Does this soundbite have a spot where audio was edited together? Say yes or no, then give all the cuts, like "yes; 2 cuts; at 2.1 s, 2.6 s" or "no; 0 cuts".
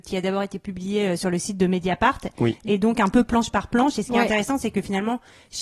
no; 0 cuts